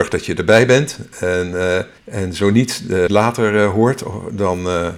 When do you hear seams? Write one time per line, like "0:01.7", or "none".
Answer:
0:02.0
0:03.1